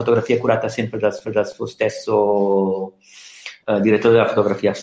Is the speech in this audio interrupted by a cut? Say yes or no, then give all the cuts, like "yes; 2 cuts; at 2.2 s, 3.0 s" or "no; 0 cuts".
yes; 1 cut; at 1.2 s